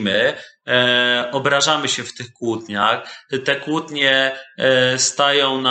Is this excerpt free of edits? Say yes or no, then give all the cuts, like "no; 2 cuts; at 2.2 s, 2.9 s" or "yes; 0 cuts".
yes; 0 cuts